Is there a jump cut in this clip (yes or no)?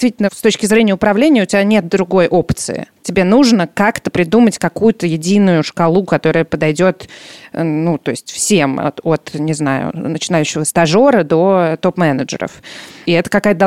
yes